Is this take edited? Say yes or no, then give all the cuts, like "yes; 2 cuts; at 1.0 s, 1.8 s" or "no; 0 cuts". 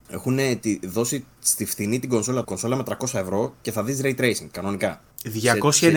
yes; 1 cut; at 2.4 s